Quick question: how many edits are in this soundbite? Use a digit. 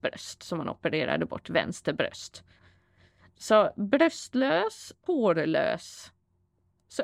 1